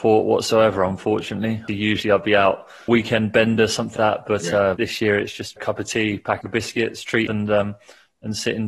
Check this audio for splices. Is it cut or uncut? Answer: cut